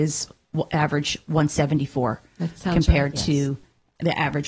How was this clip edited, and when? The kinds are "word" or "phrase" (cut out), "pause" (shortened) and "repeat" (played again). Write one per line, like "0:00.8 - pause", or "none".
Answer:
none